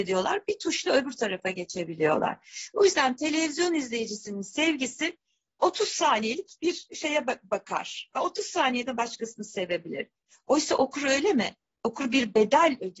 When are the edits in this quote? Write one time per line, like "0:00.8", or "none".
none